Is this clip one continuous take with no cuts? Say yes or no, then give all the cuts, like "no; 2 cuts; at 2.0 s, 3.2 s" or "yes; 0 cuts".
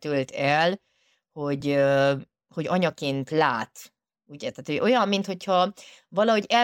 yes; 0 cuts